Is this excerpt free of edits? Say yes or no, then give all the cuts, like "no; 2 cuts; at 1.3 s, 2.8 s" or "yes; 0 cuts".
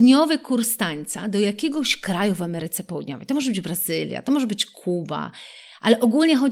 yes; 0 cuts